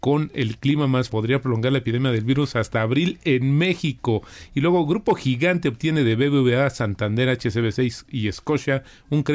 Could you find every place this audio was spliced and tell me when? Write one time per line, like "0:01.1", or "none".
0:01.1